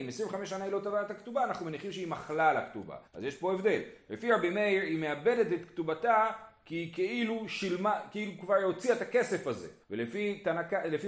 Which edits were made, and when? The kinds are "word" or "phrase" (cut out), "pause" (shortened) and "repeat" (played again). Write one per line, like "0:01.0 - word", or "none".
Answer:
0:03.1 - pause
0:09.8 - pause